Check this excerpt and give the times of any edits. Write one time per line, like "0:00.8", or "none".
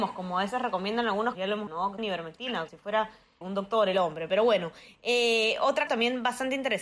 0:01.3
0:01.7
0:02.0
0:02.7
0:03.4
0:05.9